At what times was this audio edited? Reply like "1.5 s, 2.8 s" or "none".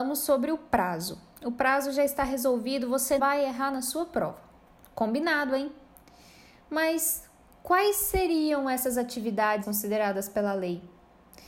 3.2 s, 9.6 s